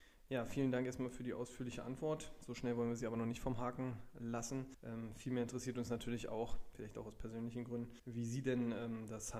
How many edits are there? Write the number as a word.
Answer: two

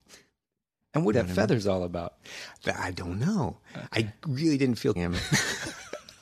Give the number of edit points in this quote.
two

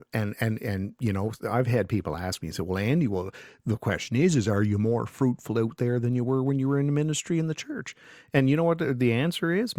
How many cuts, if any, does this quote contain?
zero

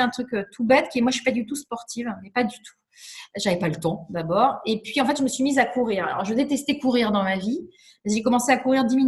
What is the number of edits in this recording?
zero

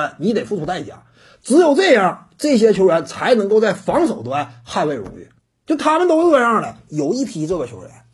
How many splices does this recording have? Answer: one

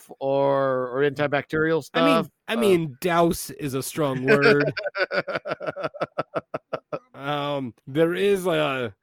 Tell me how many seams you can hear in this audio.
one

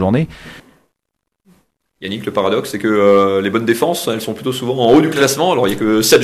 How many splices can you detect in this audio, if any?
zero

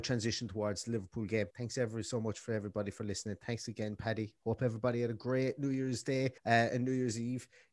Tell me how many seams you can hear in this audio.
two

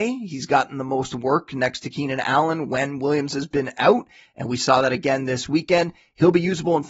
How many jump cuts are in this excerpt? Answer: zero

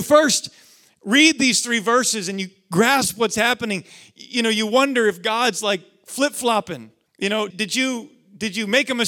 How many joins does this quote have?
two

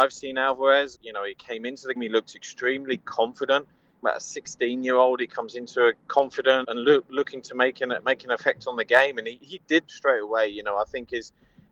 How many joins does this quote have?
six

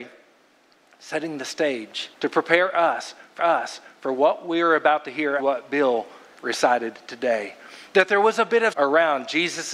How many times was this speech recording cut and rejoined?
four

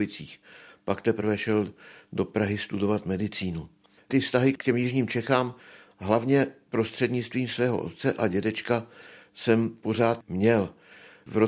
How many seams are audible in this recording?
zero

